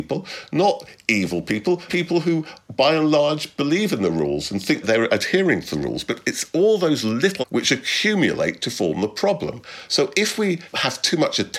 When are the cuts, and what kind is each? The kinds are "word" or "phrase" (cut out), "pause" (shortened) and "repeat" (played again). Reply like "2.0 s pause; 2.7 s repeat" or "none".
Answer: 1.9 s word; 4.8 s word; 7.4 s word